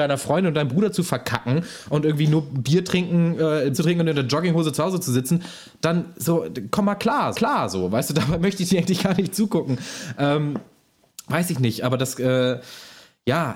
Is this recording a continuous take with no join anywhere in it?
no; 2 cuts; at 3.7 s, 7.3 s

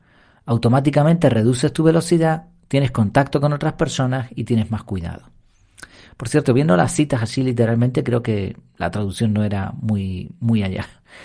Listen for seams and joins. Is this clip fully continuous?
yes; 0 cuts

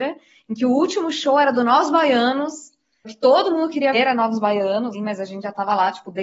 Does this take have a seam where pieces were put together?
yes; 3 cuts; at 3.0 s, 3.9 s, 4.9 s

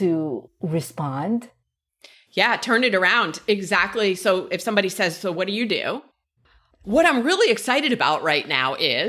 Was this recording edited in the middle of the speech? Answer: no; 0 cuts

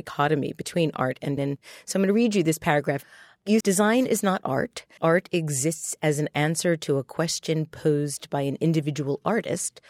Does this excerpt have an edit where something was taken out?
yes; 3 cuts; at 1.4 s, 3.6 s, 5.0 s

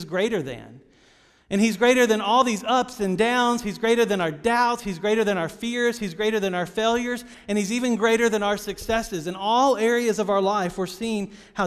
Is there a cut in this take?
no; 0 cuts

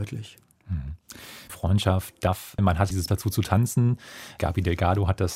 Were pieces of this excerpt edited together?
yes; 2 cuts; at 1.5 s, 3.1 s

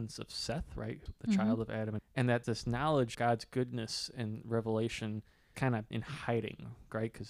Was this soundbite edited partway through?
yes; 6 cuts; at 1.1 s, 2.0 s, 2.4 s, 3.1 s, 5.5 s, 5.9 s

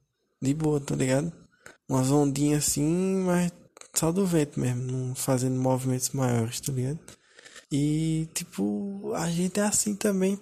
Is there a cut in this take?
yes; 2 cuts; at 1.8 s, 7.6 s

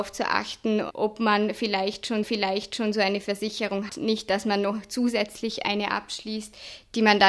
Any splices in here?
yes; 2 cuts; at 2.2 s, 3.9 s

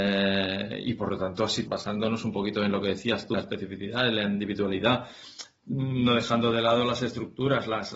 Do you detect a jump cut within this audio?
yes; 2 cuts; at 1.7 s, 3.3 s

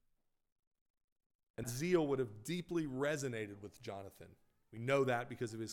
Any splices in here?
yes; 1 cut; at 1.6 s

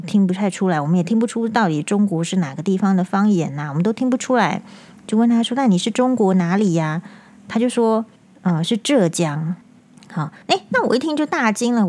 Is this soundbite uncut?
no; 4 cuts; at 7.1 s, 8.2 s, 9.6 s, 10.4 s

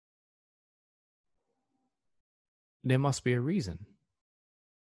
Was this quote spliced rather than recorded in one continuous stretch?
no; 0 cuts

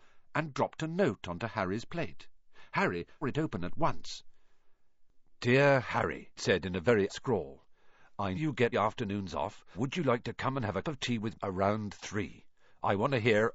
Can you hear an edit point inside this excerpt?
yes; 8 cuts; at 3.2 s, 6.4 s, 7.1 s, 8.3 s, 8.7 s, 9.7 s, 10.8 s, 11.3 s

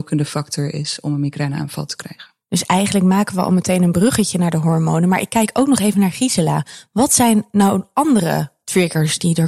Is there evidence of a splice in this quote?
no; 0 cuts

